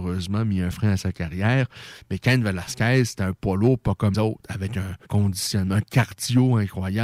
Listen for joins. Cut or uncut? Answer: cut